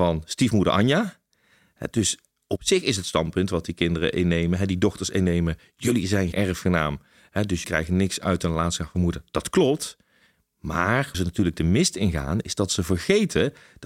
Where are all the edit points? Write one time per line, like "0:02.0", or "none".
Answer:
0:06.3
0:07.6
0:11.1